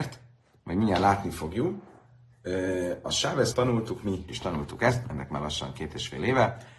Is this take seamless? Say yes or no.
no